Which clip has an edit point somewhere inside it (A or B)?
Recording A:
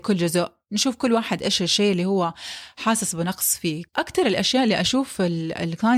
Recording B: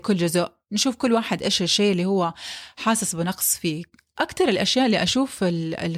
A